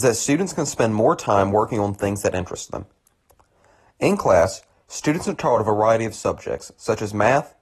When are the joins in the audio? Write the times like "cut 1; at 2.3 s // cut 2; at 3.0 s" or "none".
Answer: none